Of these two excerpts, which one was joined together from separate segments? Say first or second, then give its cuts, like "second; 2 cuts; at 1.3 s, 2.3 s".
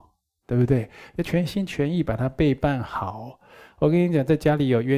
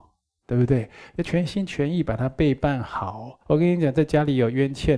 second; 1 cut; at 3.4 s